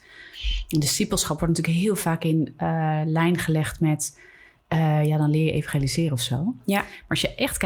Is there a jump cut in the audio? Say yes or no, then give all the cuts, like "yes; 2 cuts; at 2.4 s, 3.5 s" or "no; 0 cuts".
no; 0 cuts